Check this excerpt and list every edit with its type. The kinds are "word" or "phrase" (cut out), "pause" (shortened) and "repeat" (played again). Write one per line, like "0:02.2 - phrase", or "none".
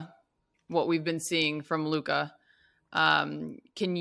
none

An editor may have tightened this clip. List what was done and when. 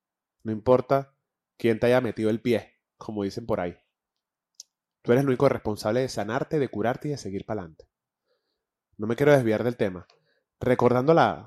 none

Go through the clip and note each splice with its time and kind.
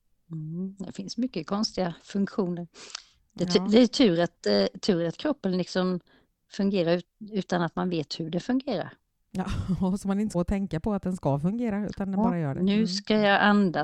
0:10.3 - phrase

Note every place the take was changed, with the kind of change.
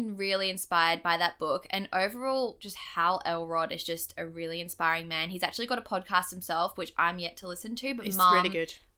none

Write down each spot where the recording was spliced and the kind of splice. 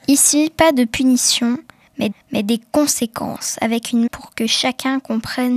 0:02.1 - repeat
0:04.1 - word

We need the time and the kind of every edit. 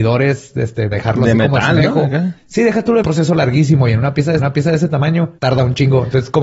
0:00.9 - word
0:02.4 - pause
0:03.0 - phrase
0:04.4 - repeat
0:05.4 - pause

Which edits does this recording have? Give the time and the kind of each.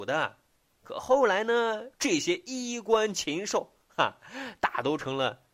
0:01.9 - pause

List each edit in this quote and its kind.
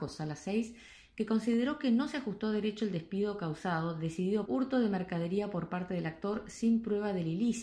0:04.5 - phrase

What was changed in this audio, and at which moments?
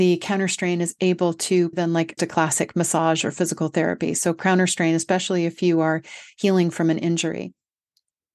0:01.7 - phrase
0:02.2 - word

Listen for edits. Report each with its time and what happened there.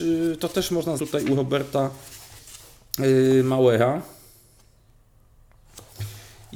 0:01.0 - word

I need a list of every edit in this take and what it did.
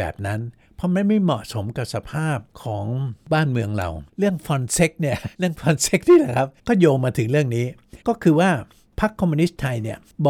0:04.1 - pause
0:05.3 - pause
0:06.6 - pause
0:08.0 - pause

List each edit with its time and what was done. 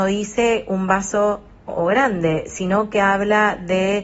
0:01.7 - phrase

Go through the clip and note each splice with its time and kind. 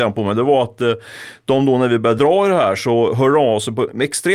none

